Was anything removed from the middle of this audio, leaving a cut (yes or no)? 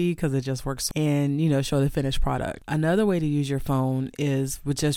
yes